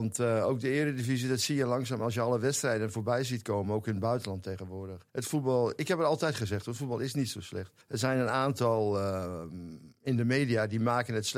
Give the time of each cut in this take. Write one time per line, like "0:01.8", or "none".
0:05.1
0:07.8
0:09.9